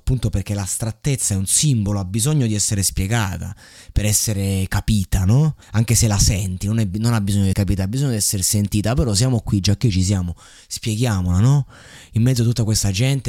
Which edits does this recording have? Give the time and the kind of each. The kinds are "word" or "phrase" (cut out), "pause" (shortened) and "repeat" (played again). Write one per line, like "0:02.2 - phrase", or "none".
0:05.6 - pause
0:07.5 - word